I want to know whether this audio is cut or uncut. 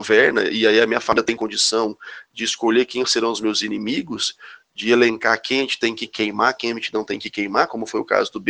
uncut